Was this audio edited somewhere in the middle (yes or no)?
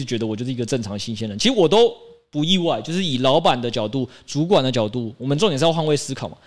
no